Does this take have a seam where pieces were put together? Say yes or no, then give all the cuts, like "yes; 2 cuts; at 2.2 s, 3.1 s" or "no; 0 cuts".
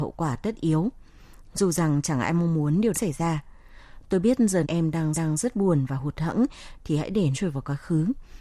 yes; 5 cuts; at 2.9 s, 4.6 s, 5.1 s, 6.8 s, 7.3 s